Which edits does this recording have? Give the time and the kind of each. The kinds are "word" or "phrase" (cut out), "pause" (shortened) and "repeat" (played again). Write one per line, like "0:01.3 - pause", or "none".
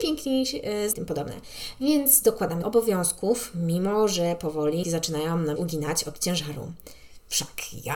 0:00.9 - phrase
0:02.6 - word
0:04.8 - word
0:05.6 - word